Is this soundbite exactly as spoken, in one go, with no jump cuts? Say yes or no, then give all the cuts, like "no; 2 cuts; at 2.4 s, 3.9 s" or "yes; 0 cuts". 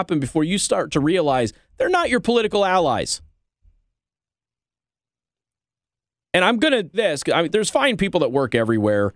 no; 2 cuts; at 6.9 s, 7.5 s